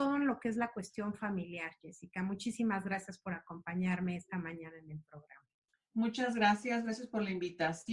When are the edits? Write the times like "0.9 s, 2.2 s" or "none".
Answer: 5.7 s